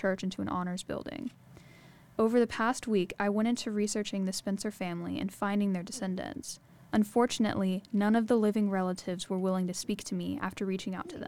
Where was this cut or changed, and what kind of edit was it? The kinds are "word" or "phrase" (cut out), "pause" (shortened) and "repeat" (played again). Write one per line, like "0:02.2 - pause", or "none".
none